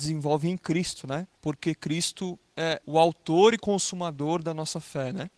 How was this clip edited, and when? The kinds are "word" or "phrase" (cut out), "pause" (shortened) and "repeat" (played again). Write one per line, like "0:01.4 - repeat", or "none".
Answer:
0:01.3 - pause
0:02.8 - word